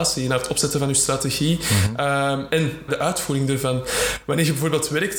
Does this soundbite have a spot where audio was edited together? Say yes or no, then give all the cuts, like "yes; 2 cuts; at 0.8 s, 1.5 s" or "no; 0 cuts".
yes; 1 cut; at 2.9 s